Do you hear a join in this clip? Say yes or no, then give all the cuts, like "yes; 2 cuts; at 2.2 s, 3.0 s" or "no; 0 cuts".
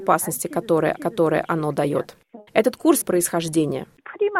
yes; 3 cuts; at 1.0 s, 2.5 s, 3.0 s